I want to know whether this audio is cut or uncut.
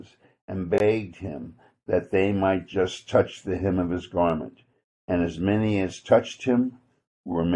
uncut